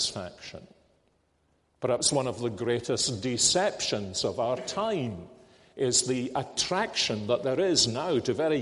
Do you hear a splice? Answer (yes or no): no